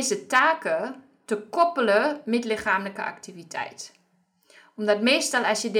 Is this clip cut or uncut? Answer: uncut